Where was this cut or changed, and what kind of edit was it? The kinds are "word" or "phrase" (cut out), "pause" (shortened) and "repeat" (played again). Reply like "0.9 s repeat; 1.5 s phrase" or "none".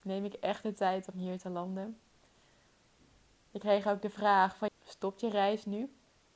4.7 s word